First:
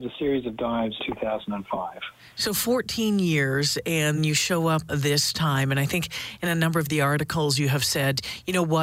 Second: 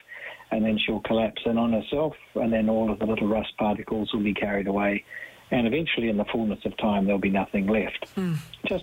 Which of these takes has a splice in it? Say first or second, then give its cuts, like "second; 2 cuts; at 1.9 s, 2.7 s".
first; 3 cuts; at 1.0 s, 4.2 s, 4.9 s